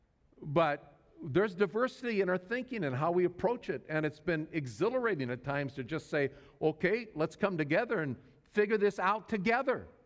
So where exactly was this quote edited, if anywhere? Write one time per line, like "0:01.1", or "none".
none